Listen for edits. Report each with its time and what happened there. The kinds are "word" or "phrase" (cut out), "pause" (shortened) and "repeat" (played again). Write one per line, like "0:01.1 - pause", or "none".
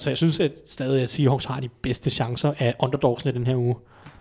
none